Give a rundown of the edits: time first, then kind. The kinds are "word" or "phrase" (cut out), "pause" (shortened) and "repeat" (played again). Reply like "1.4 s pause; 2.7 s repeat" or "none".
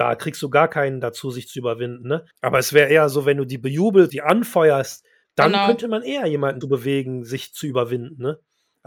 2.3 s pause; 4.1 s word; 5.2 s pause; 6.6 s word